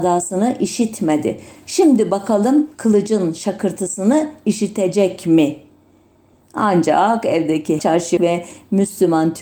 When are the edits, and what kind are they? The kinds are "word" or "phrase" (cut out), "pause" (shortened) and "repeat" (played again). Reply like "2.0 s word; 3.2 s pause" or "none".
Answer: 2.7 s pause; 7.8 s word; 8.2 s word